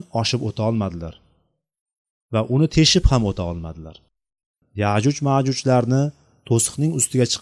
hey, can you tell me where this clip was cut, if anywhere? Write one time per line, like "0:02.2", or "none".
none